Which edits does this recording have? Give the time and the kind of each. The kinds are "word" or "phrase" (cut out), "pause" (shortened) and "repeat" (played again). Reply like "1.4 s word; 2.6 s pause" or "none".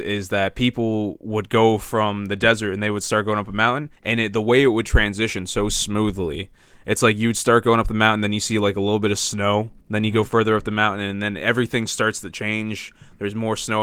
3.9 s pause; 9.8 s pause